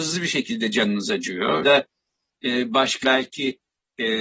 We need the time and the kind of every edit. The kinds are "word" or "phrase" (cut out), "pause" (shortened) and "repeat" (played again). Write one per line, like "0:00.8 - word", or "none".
0:01.6 - word
0:03.0 - word